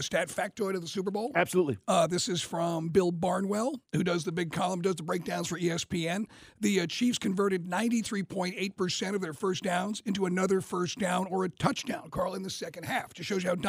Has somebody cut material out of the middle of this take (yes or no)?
no